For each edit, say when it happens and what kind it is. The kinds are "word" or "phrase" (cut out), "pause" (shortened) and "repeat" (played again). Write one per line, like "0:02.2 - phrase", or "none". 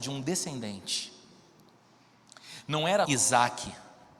0:03.1 - word